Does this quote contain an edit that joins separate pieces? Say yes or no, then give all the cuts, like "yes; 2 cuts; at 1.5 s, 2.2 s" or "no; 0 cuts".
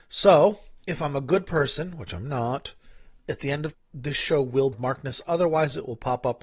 yes; 3 cuts; at 3.2 s, 3.7 s, 4.7 s